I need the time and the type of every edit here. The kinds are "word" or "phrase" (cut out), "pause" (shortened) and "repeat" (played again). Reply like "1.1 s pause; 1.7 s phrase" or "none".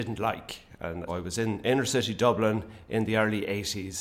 1.1 s word